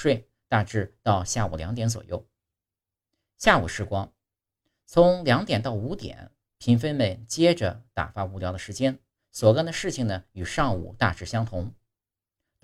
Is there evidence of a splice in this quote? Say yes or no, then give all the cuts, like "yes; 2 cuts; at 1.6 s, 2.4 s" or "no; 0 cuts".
no; 0 cuts